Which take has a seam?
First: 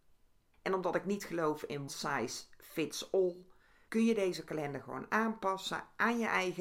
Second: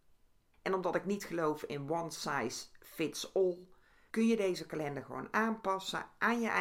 first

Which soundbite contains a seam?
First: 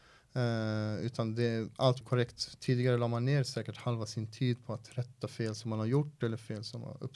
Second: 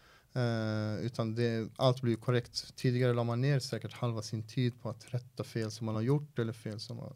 first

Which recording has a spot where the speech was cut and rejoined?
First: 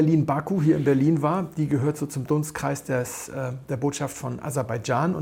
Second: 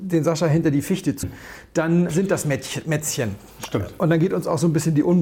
second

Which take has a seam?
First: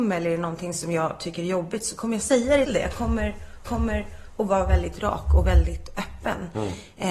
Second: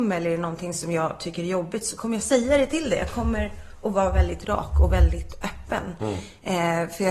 first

